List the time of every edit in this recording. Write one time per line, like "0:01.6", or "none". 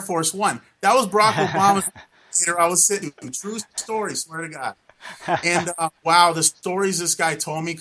0:03.0